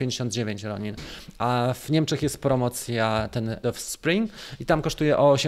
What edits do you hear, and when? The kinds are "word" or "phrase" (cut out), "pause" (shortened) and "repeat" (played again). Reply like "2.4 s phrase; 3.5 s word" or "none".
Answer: 3.6 s word

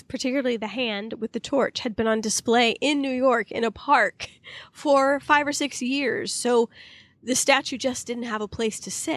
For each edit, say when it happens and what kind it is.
none

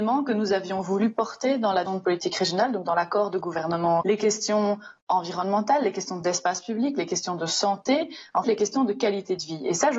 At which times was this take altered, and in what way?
1.9 s word; 4.0 s word; 8.4 s word

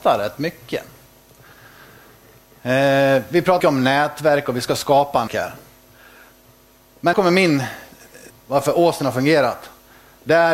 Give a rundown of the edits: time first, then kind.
3.6 s word; 5.3 s word; 7.1 s word; 8.3 s word

